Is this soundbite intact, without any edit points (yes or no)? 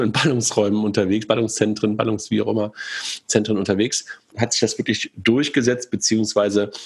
no